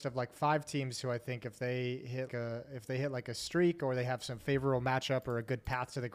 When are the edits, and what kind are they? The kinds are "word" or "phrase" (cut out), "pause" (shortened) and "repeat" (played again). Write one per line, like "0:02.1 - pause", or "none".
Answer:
0:02.3 - word